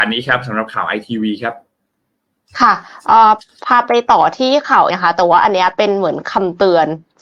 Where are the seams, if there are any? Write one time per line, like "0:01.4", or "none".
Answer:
0:04.9